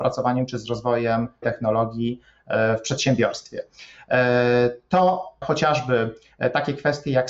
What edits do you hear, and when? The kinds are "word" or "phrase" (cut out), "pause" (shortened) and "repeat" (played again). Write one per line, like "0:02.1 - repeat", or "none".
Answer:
0:01.4 - word
0:05.4 - word